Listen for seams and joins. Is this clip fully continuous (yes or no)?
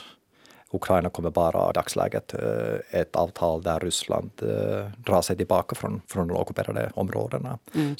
no